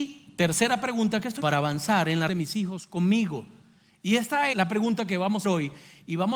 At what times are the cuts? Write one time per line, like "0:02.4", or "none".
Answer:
0:01.4
0:02.3
0:04.5
0:05.4

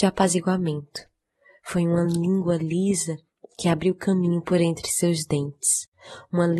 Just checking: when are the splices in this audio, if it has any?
none

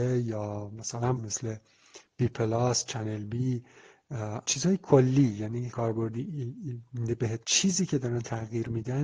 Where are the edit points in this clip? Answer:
0:01.2
0:04.4
0:05.7
0:07.4

